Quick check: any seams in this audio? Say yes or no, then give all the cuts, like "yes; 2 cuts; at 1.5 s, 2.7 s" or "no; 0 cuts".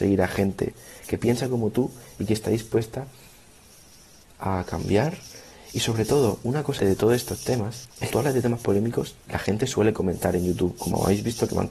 yes; 3 cuts; at 6.8 s, 8.1 s, 9.2 s